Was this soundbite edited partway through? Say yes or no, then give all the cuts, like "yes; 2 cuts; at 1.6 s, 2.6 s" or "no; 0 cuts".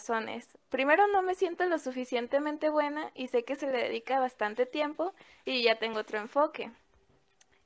no; 0 cuts